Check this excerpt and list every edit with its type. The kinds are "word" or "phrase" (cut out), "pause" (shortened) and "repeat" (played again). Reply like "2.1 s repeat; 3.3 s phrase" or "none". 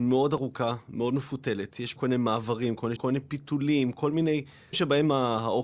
2.0 s word; 3.0 s word; 4.7 s word